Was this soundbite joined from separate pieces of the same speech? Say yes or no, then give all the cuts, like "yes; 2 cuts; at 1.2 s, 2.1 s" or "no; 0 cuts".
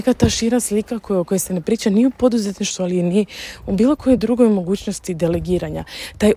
no; 0 cuts